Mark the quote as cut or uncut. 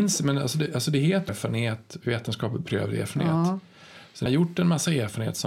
cut